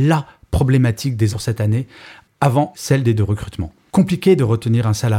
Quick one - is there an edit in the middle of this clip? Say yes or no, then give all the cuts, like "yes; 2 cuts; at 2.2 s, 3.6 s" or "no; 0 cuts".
yes; 3 cuts; at 1.3 s, 2.7 s, 3.2 s